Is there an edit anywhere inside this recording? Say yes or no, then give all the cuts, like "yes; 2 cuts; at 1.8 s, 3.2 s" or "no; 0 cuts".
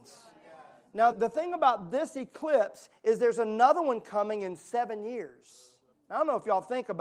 yes; 2 cuts; at 1.1 s, 5.9 s